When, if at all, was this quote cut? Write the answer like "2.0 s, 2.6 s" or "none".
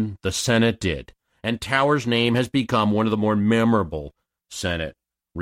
none